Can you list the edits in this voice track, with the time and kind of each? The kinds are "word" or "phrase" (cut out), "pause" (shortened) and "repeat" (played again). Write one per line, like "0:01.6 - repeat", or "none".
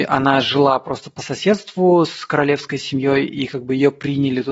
none